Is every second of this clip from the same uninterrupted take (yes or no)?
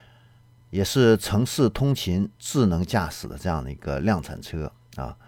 no